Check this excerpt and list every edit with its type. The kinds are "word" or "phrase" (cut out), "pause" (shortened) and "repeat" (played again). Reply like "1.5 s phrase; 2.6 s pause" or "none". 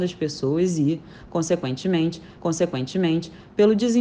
2.4 s repeat